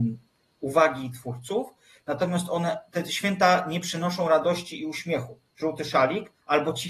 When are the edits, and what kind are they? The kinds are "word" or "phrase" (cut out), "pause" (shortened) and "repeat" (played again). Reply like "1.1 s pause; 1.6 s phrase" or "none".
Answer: none